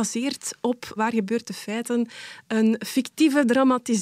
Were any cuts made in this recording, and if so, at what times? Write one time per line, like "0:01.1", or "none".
0:01.0